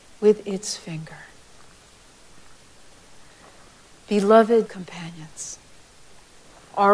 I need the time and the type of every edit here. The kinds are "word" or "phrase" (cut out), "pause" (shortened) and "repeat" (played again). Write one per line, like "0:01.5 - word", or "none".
0:04.7 - word